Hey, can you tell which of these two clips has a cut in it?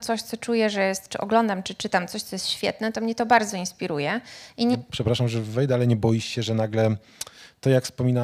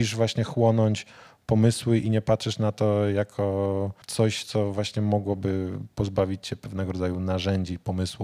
second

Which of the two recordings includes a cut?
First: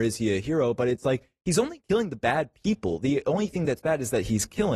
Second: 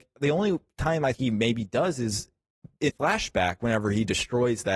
second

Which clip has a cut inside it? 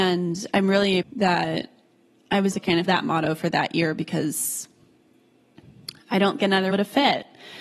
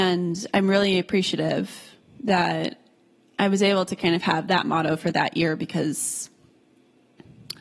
first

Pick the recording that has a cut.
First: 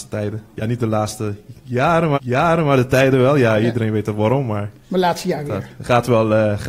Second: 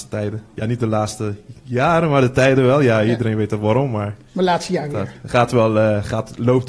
first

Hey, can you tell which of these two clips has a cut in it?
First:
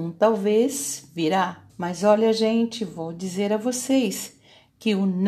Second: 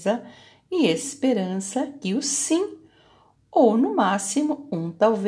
first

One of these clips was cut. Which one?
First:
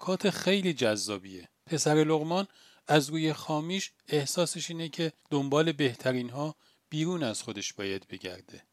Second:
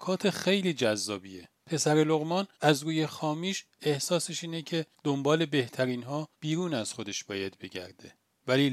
second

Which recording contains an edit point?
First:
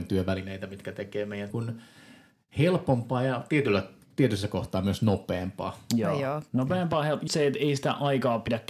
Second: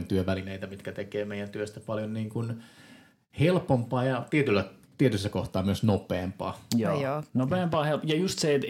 first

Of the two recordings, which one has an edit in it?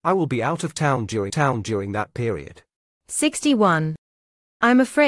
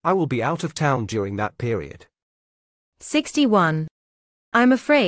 first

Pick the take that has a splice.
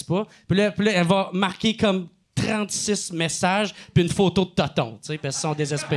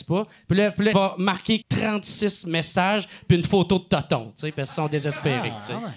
second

